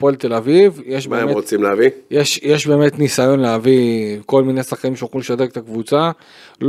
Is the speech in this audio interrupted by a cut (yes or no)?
no